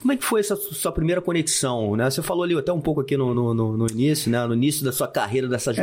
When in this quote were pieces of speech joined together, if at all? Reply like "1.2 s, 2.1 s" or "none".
none